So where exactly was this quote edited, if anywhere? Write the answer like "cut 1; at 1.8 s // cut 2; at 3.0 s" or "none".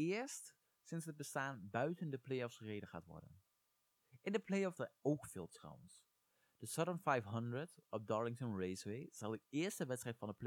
cut 1; at 4.8 s